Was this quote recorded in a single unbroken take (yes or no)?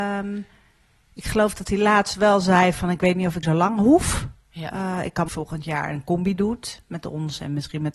no